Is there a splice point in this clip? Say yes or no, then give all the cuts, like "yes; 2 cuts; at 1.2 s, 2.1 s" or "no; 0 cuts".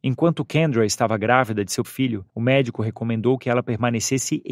yes; 2 cuts; at 1.8 s, 2.3 s